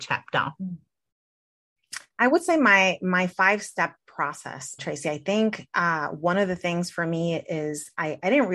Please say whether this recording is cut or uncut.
cut